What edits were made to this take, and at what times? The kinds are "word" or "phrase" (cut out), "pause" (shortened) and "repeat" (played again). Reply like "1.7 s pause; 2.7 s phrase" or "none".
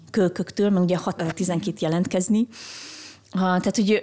1.2 s word; 1.7 s phrase